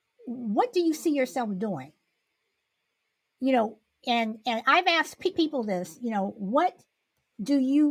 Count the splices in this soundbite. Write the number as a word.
zero